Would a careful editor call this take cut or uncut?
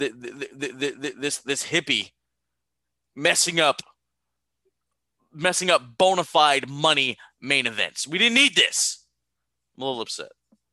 uncut